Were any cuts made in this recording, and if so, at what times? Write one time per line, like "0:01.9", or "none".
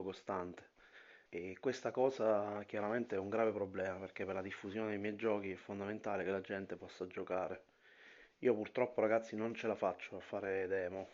0:01.3